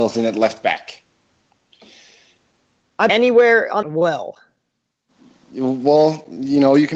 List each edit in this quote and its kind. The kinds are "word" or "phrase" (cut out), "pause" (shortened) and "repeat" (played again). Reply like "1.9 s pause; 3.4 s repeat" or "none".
3.1 s word; 3.8 s phrase